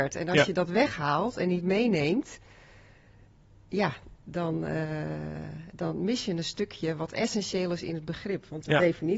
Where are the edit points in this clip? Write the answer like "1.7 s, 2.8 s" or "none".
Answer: none